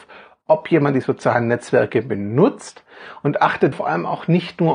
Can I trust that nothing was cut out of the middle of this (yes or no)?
no